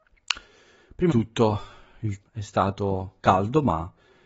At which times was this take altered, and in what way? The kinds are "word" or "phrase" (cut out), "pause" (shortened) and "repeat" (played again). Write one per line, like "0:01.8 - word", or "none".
0:01.1 - word
0:02.2 - word